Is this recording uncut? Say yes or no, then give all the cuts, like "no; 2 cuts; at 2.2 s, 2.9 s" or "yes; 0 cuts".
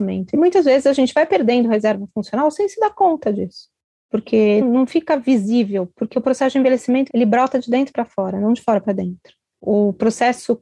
no; 1 cut; at 4.6 s